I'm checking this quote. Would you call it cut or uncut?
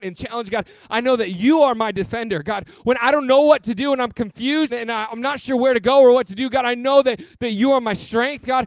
cut